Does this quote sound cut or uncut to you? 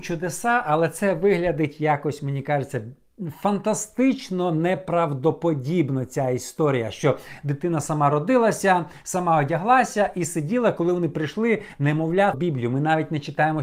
cut